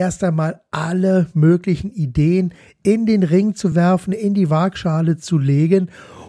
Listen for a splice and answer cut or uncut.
uncut